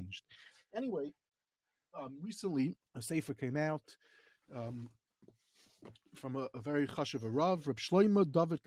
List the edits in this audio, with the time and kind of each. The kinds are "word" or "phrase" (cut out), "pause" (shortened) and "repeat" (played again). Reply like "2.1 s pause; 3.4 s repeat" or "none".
2.9 s pause